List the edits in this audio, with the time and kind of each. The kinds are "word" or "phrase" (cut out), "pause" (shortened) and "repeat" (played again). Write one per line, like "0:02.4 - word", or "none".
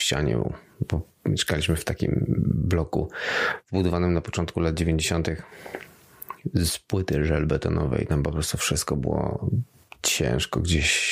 none

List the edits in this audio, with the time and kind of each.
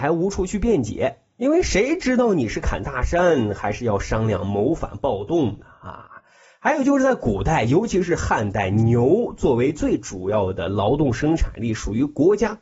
none

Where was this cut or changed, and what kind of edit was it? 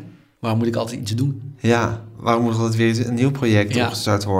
none

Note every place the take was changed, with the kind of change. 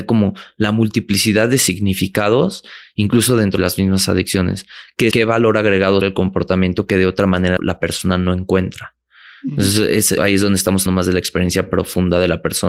0:03.6 - word
0:05.1 - word
0:06.0 - word
0:07.6 - word
0:10.2 - word
0:10.9 - word

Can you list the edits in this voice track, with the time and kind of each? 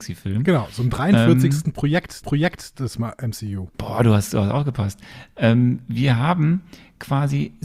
0:02.2 - repeat
0:03.7 - pause

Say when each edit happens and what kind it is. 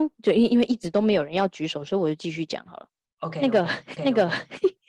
0:04.0 - repeat

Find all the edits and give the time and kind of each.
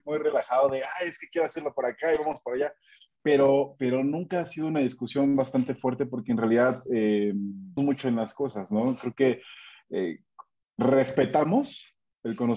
0:07.8 - word

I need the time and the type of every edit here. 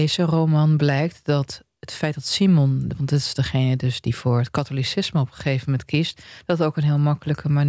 none

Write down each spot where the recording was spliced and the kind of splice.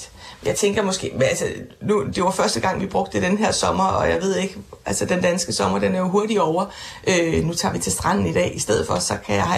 none

